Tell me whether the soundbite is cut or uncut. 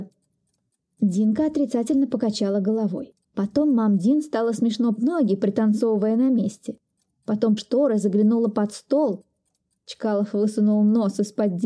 cut